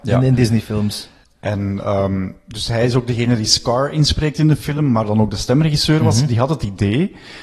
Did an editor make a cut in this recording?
no; 0 cuts

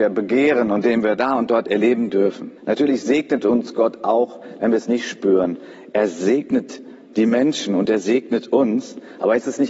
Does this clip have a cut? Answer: yes; 1 cut; at 2.6 s

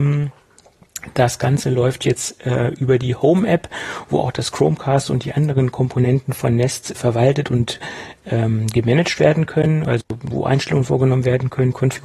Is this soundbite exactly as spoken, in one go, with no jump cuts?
no; 1 cut; at 6.9 s

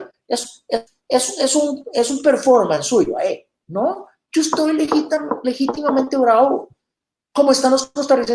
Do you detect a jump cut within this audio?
no; 0 cuts

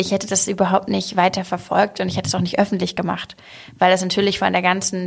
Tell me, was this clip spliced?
no; 0 cuts

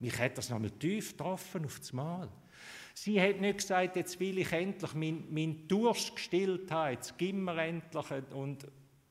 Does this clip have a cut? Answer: no; 0 cuts

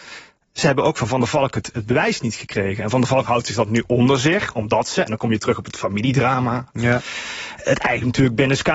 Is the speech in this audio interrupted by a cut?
no; 0 cuts

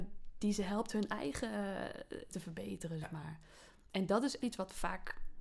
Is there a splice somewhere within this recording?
yes; 3 cuts; at 2.3 s, 3.0 s, 4.4 s

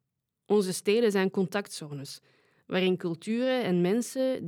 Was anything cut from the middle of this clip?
no; 0 cuts

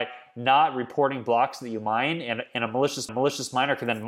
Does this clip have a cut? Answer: yes; 1 cut; at 3.1 s

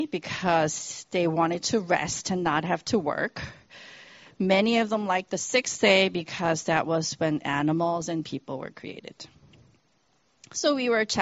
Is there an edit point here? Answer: no; 0 cuts

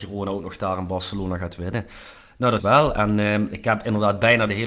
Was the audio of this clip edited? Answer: yes; 1 cut; at 2.6 s

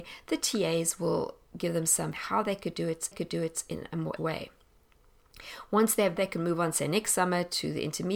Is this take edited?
yes; 5 cuts; at 1.5 s, 2.1 s, 3.1 s, 4.2 s, 6.2 s

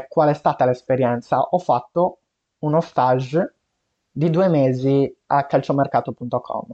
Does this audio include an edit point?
no; 0 cuts

